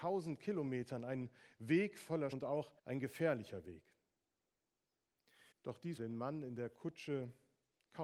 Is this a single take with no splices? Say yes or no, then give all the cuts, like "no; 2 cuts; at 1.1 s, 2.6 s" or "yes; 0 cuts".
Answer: no; 4 cuts; at 2.3 s, 2.8 s, 5.5 s, 6.0 s